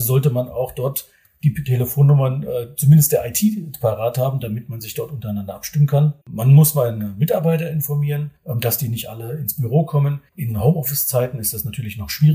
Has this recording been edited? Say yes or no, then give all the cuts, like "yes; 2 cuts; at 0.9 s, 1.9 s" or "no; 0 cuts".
yes; 3 cuts; at 6.2 s, 8.4 s, 10.3 s